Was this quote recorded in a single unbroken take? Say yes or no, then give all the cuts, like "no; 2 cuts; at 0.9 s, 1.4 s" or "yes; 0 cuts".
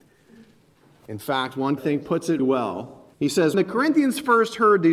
no; 4 cuts; at 1.8 s, 2.4 s, 3.1 s, 3.5 s